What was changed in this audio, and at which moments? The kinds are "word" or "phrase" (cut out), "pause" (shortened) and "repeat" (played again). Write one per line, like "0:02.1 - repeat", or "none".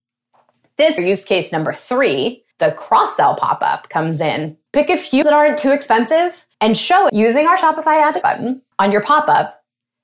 0:01.0 - phrase
0:02.5 - pause
0:04.7 - pause
0:05.2 - word
0:06.5 - pause
0:07.1 - word
0:08.2 - word
0:08.7 - pause